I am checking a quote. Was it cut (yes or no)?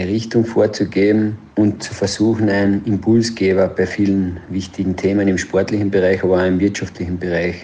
yes